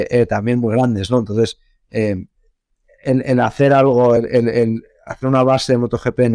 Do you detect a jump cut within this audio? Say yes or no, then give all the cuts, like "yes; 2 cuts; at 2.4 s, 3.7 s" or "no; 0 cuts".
no; 0 cuts